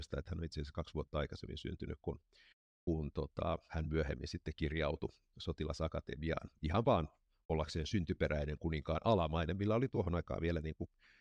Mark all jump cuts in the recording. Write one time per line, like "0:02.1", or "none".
none

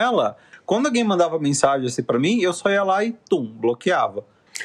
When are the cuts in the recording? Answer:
none

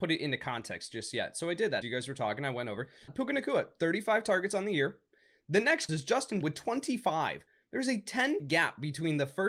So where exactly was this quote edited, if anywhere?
0:01.8
0:03.1
0:05.9
0:06.4
0:08.4

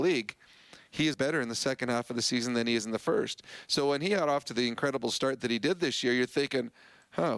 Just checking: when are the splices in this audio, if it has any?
0:01.1

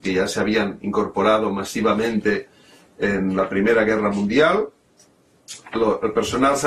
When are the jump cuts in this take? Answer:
none

